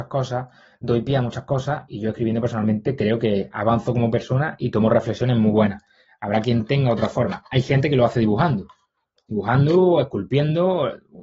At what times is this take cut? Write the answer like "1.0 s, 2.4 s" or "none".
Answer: none

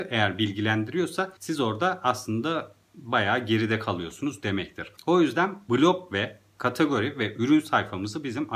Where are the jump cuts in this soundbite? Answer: 1.4 s, 2.8 s, 5.0 s

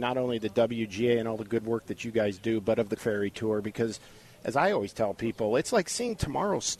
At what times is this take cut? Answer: 3.0 s

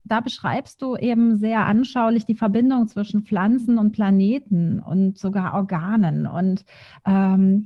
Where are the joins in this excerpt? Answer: none

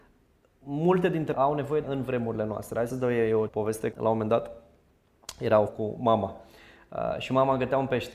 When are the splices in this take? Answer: 1.3 s, 1.8 s, 2.9 s, 3.5 s, 3.9 s, 5.7 s

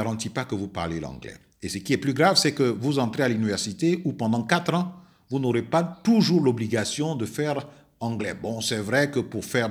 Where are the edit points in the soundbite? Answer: none

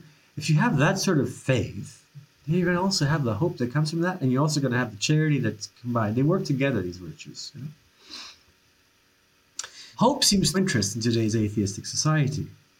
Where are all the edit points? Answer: 9.9 s, 10.5 s

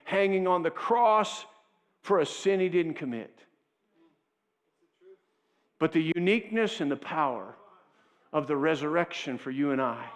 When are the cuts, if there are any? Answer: none

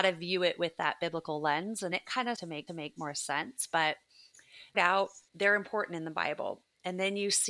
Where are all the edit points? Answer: 1.9 s, 2.3 s, 2.7 s, 4.7 s, 5.3 s

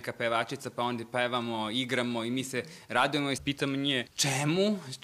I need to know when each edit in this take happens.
3.4 s, 4.1 s

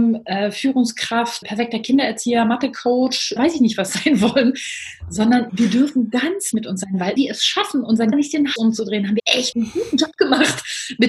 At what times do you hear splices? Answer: 1.4 s, 3.4 s, 5.5 s, 6.5 s, 7.2 s, 8.1 s, 8.6 s, 9.2 s, 9.5 s

